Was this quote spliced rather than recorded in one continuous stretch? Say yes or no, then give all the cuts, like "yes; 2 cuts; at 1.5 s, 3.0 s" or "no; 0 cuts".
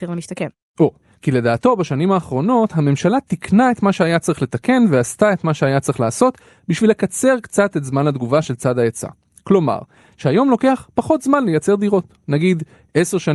no; 0 cuts